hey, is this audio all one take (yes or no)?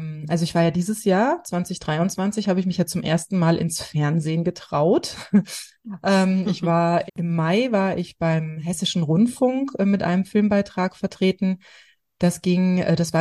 no